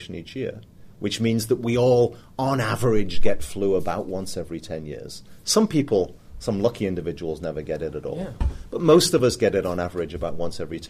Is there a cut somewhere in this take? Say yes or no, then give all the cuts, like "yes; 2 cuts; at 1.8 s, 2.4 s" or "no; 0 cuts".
no; 0 cuts